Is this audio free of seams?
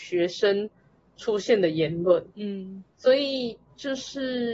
no; 1 cut; at 2.9 s

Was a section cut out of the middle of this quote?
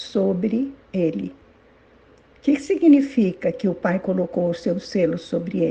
no; 0 cuts

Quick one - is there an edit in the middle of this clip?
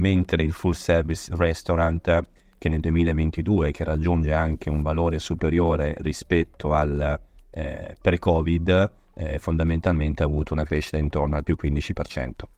no; 0 cuts

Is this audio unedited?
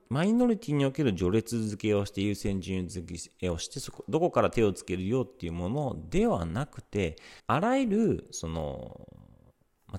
no; 1 cut; at 7.4 s

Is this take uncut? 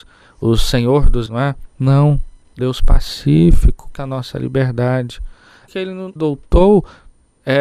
no; 5 cuts; at 1.3 s, 2.6 s, 4.0 s, 5.7 s, 6.2 s

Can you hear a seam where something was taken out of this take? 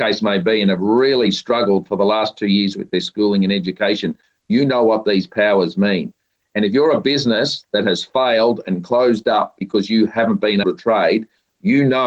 yes; 1 cut; at 10.6 s

